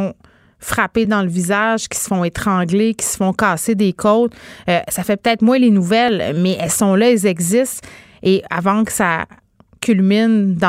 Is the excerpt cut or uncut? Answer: uncut